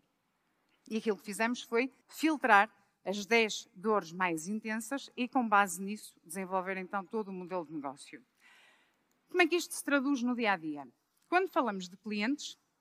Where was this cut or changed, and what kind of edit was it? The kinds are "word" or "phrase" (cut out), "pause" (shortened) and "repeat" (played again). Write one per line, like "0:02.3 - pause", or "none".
0:02.0 - pause